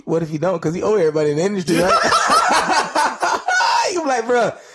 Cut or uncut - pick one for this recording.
uncut